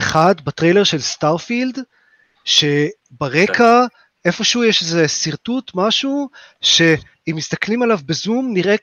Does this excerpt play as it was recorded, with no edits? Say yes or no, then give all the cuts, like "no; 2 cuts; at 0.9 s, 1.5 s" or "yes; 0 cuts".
yes; 0 cuts